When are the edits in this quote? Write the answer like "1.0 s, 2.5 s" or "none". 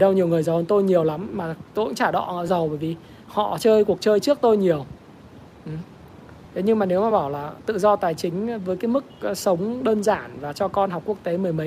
none